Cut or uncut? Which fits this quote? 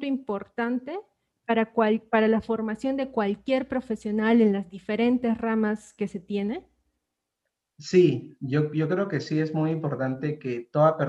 uncut